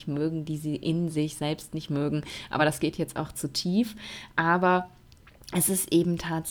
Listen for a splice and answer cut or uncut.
uncut